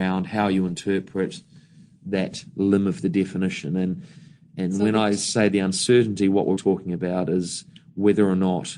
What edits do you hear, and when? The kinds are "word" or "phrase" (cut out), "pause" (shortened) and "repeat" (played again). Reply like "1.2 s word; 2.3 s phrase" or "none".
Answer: 6.6 s word

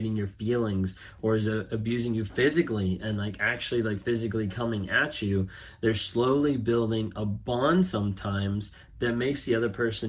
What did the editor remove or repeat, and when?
none

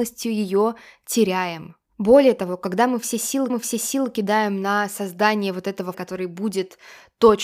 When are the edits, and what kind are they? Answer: 1.8 s pause; 3.5 s repeat; 5.9 s word

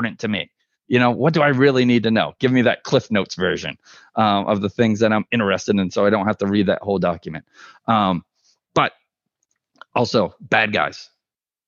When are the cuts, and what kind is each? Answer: none

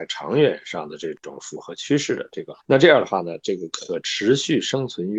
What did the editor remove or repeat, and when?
2.6 s pause

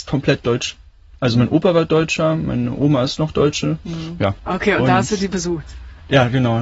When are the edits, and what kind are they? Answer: none

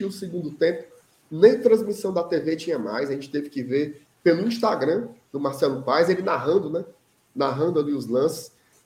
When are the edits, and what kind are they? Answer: 4.1 s pause

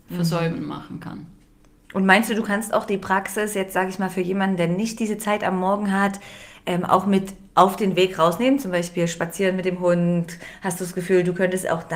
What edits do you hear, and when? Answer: none

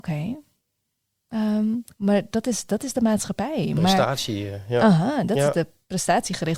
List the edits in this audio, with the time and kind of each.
1.9 s pause

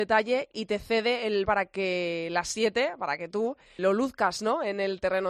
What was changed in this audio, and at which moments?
1.5 s word; 3.8 s word

